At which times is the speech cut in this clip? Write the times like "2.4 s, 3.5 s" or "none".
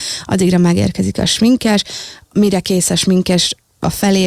none